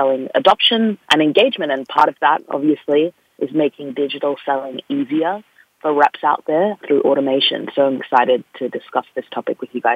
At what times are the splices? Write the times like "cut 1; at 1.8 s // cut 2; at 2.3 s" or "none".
cut 1; at 1.0 s // cut 2; at 6.8 s // cut 3; at 8.0 s